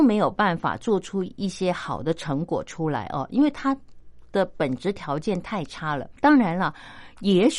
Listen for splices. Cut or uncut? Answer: cut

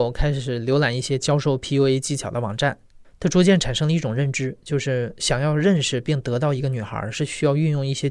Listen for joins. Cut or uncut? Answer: uncut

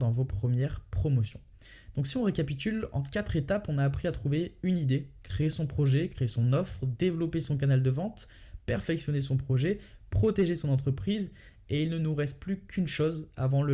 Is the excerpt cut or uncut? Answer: uncut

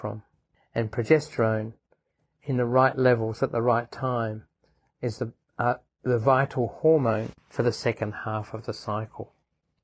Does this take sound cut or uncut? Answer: uncut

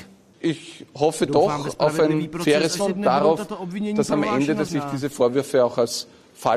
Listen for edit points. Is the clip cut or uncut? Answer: cut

